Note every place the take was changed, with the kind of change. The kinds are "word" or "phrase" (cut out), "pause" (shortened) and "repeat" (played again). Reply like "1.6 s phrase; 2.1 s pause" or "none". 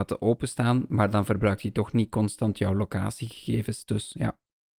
none